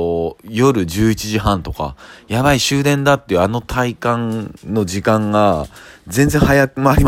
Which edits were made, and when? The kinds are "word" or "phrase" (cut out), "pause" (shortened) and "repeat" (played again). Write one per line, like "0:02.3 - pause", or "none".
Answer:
none